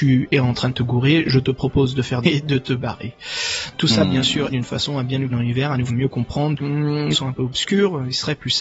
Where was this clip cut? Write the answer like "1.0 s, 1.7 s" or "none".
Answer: 2.2 s, 4.5 s, 5.3 s, 5.9 s, 6.6 s, 7.1 s